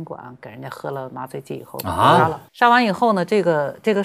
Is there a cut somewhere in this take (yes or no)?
yes